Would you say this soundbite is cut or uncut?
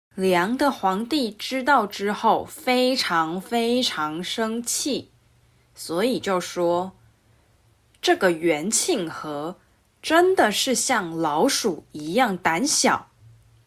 uncut